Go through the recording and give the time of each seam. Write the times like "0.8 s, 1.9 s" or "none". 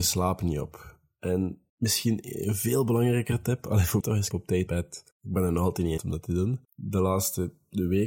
1.7 s, 4.0 s, 4.3 s, 4.7 s, 5.1 s, 6.0 s, 6.6 s